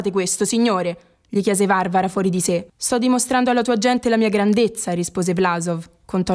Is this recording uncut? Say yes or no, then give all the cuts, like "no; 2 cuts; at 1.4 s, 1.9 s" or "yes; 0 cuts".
no; 1 cut; at 2.7 s